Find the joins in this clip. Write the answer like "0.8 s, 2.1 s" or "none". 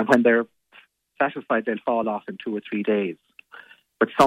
none